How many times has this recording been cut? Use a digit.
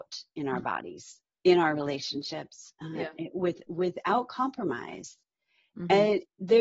1